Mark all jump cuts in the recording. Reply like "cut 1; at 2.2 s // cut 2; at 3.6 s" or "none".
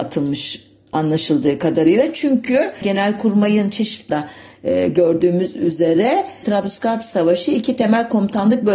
cut 1; at 4.1 s